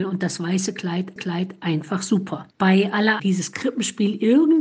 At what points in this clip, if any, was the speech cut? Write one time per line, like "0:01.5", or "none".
0:01.2
0:02.5
0:03.2